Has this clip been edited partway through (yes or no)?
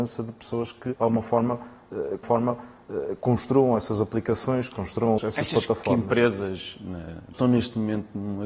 yes